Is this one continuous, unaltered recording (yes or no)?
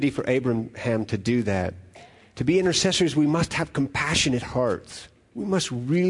yes